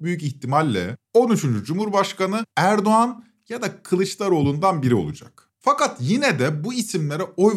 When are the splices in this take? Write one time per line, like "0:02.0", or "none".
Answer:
0:01.1
0:02.5
0:05.5